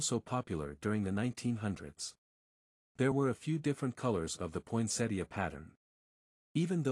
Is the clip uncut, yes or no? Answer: yes